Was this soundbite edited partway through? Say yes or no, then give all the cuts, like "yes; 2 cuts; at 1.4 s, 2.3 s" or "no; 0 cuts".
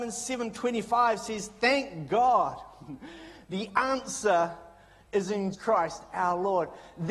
yes; 1 cut; at 5.5 s